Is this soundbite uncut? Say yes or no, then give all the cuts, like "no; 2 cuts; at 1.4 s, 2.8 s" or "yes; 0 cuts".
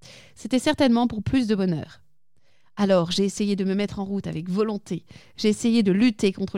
yes; 0 cuts